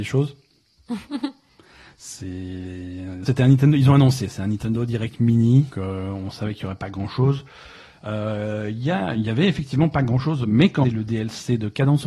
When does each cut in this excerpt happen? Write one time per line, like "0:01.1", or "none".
0:03.3
0:05.7
0:10.8